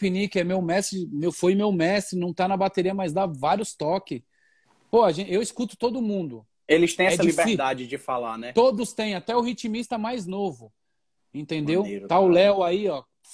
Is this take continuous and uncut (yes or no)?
yes